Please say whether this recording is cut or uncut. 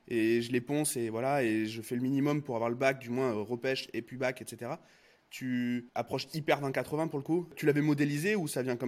uncut